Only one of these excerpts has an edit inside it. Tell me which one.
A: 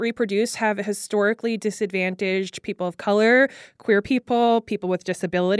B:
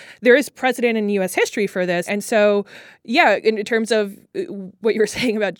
B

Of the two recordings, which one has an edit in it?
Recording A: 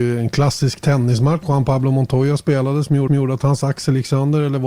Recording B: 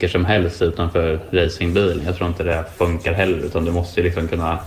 A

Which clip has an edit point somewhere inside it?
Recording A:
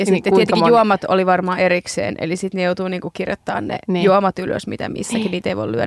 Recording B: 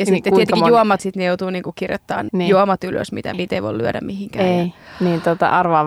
B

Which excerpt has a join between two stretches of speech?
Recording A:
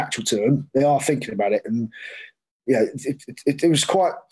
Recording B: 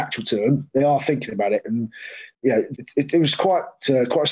B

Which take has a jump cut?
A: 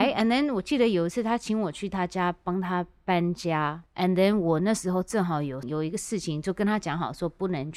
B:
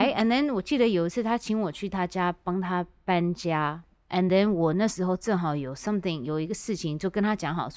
A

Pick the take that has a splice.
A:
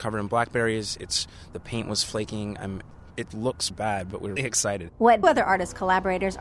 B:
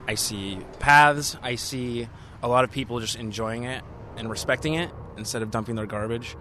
A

